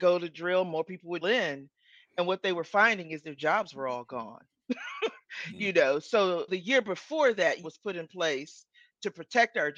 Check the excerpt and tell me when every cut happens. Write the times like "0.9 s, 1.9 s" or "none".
1.2 s, 3.2 s, 6.5 s, 7.6 s

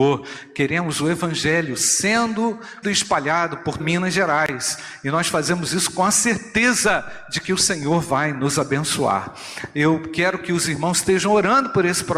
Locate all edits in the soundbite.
2.8 s, 3.8 s

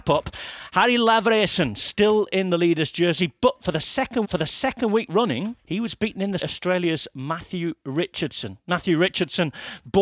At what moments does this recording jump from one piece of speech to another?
4.2 s, 5.6 s, 6.4 s

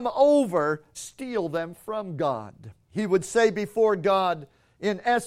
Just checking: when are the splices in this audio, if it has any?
0.9 s, 2.8 s

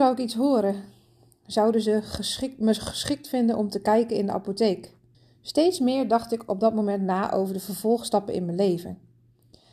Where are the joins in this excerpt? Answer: 5.1 s

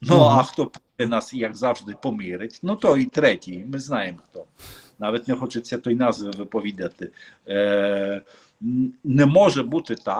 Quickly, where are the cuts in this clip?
none

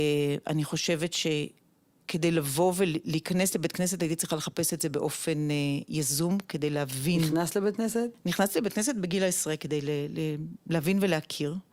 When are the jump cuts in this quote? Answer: none

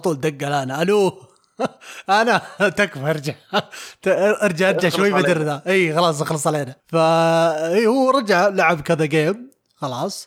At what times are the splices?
6.8 s

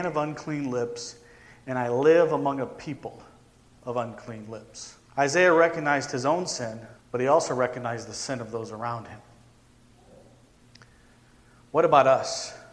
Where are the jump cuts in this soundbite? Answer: 5.1 s, 7.0 s

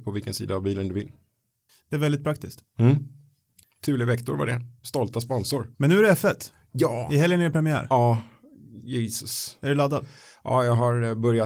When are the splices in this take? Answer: 4.8 s, 5.7 s

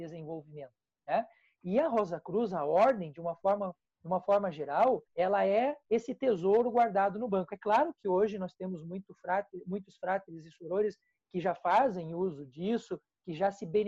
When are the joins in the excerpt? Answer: 5.1 s

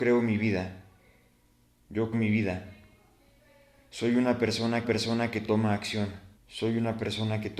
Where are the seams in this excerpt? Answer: 2.1 s, 4.8 s, 6.4 s

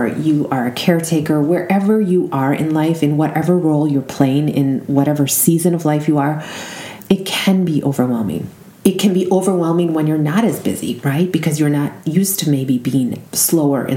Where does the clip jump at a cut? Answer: none

